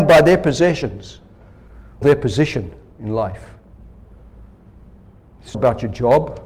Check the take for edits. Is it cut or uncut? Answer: cut